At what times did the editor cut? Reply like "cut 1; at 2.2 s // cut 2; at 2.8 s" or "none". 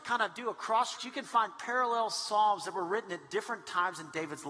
cut 1; at 1.0 s